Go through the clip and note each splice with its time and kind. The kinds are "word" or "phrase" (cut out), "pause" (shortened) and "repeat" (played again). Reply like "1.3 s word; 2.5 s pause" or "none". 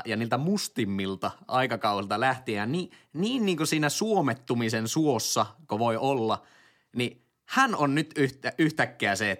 none